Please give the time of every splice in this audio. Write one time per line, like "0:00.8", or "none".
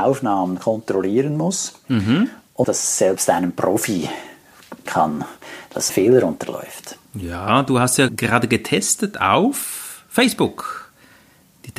0:02.6
0:04.9
0:05.9
0:08.1

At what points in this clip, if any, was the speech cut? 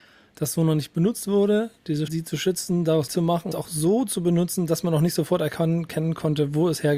0:02.1
0:03.1
0:03.5

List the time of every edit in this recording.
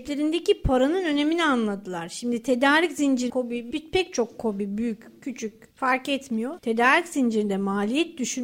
0:03.3
0:03.7

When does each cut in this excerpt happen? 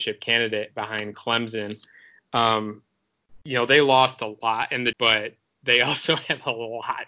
0:04.9

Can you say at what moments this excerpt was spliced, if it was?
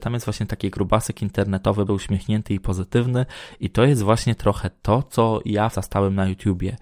0:01.9
0:05.7

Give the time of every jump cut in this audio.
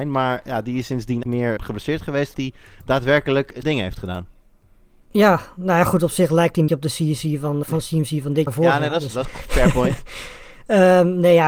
0:01.2
0:01.6
0:02.3
0:03.6
0:06.7
0:07.6
0:08.5
0:09.2

